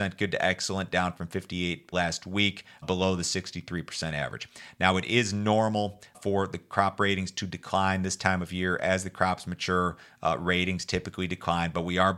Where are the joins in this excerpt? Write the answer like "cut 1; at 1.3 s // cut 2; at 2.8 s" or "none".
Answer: cut 1; at 1.9 s // cut 2; at 2.8 s // cut 3; at 6.1 s

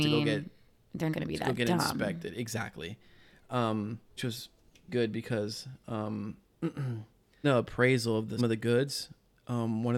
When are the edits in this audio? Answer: cut 1; at 1.1 s // cut 2; at 4.2 s // cut 3; at 4.9 s // cut 4; at 7.4 s // cut 5; at 8.4 s

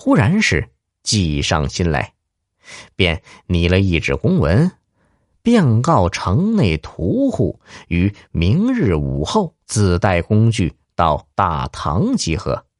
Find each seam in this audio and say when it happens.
cut 1; at 9.6 s // cut 2; at 11.3 s

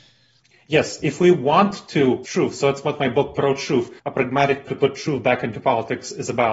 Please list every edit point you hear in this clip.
cut 1; at 2.2 s // cut 2; at 4.0 s // cut 3; at 4.7 s

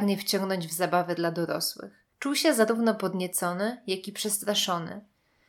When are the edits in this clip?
cut 1; at 2.1 s

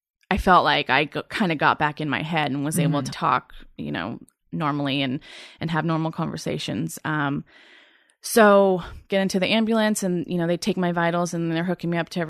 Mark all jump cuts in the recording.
cut 1; at 3.1 s

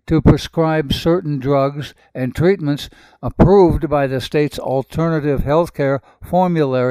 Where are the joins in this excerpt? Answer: none

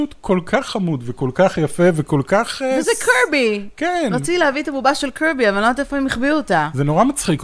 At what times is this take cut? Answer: none

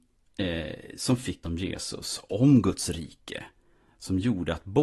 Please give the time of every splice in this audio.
cut 1; at 1.4 s

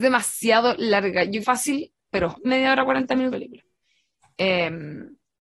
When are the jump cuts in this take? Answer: cut 1; at 1.4 s // cut 2; at 2.4 s // cut 3; at 3.3 s

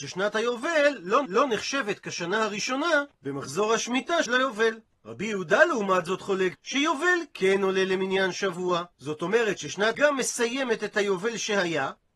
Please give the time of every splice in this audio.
cut 1; at 1.2 s // cut 2; at 3.1 s // cut 3; at 4.3 s // cut 4; at 6.5 s // cut 5; at 8.9 s // cut 6; at 9.9 s

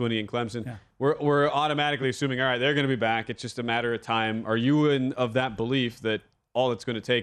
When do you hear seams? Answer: none

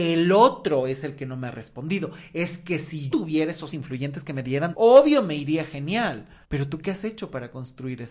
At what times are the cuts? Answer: cut 1; at 3.1 s // cut 2; at 3.7 s // cut 3; at 4.7 s // cut 4; at 6.4 s

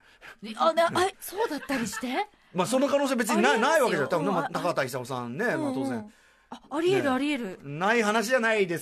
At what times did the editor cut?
cut 1; at 1.1 s

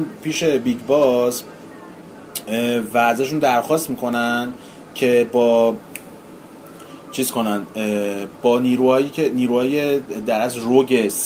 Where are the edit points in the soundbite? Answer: none

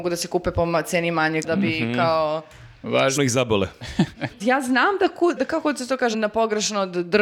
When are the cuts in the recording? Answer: cut 1; at 1.4 s // cut 2; at 3.2 s // cut 3; at 4.4 s // cut 4; at 5.4 s // cut 5; at 6.1 s

